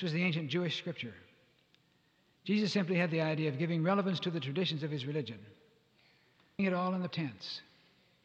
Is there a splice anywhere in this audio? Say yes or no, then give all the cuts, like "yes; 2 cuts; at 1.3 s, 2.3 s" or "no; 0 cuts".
yes; 2 cuts; at 6.6 s, 7.1 s